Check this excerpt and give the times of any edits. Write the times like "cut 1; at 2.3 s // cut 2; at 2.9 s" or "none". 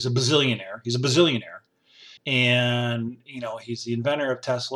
cut 1; at 2.2 s